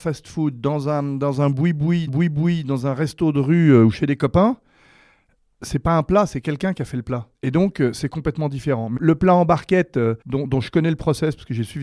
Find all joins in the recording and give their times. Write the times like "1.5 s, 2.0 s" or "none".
2.1 s, 7.4 s, 9.0 s, 10.2 s